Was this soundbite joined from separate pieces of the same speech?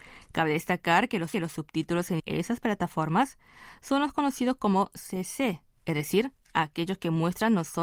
yes; 2 cuts; at 1.3 s, 2.2 s

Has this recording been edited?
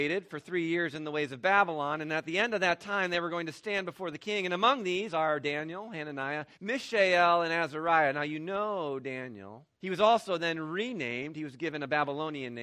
yes; 2 cuts; at 6.5 s, 9.7 s

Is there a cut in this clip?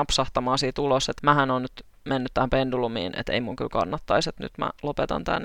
yes; 1 cut; at 1.2 s

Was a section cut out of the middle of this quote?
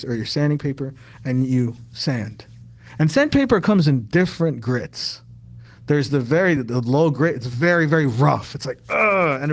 no; 0 cuts

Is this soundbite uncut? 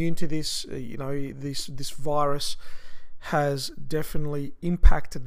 yes; 0 cuts

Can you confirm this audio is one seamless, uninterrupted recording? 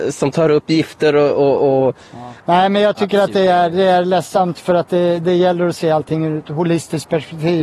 no; 1 cut; at 2.4 s

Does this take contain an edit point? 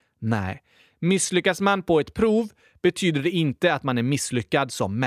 no; 0 cuts

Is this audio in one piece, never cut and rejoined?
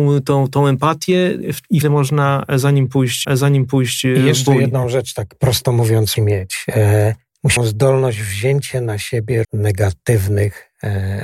no; 5 cuts; at 1.8 s, 3.2 s, 6.2 s, 7.6 s, 9.4 s

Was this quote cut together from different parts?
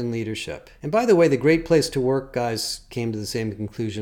no; 0 cuts

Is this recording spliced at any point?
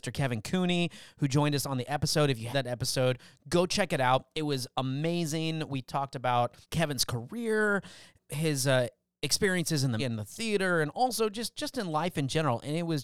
yes; 3 cuts; at 2.5 s, 6.6 s, 10.0 s

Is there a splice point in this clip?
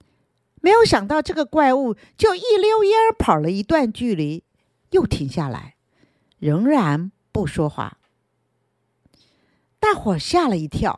no; 0 cuts

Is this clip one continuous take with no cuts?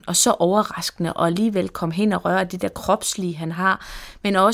yes; 0 cuts

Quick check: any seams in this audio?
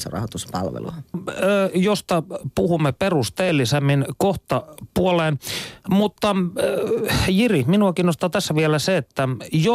no; 0 cuts

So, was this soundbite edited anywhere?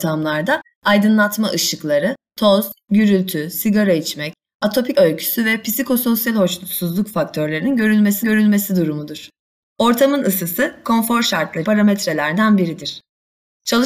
yes; 3 cuts; at 4.9 s, 8.2 s, 11.6 s

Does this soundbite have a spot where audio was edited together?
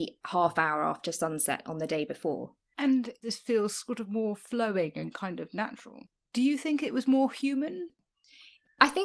no; 0 cuts

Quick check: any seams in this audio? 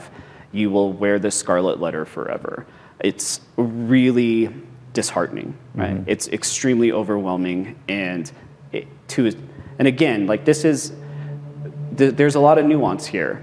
no; 0 cuts

